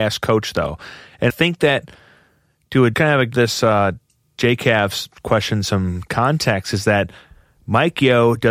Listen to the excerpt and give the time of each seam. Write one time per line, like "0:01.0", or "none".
0:01.3
0:02.9
0:03.3